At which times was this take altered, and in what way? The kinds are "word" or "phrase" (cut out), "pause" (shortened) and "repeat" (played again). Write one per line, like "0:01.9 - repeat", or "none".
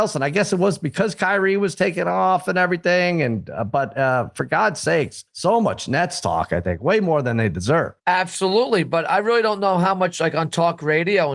0:05.3 - pause
0:08.0 - pause